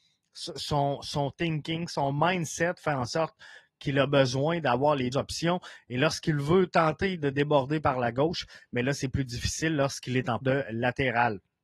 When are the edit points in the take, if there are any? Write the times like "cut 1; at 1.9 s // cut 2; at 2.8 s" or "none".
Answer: cut 1; at 5.1 s // cut 2; at 10.4 s